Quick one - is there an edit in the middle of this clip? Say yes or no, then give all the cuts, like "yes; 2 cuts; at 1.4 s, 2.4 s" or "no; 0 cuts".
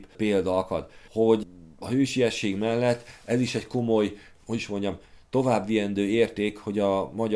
no; 0 cuts